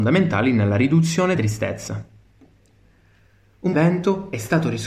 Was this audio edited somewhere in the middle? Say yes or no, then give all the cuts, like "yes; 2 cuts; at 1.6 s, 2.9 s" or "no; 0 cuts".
yes; 2 cuts; at 1.3 s, 3.7 s